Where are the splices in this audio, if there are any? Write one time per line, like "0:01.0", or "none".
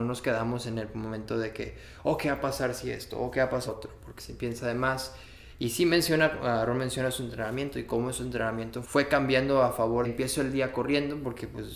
0:03.7
0:04.2
0:08.8
0:10.0